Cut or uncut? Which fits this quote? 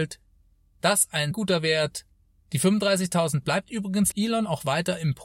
cut